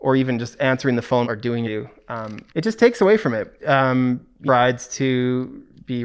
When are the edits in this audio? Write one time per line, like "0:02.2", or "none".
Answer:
0:01.2
0:01.6
0:02.5
0:03.6
0:04.5

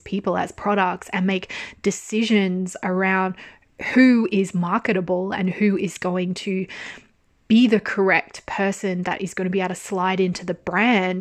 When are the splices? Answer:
none

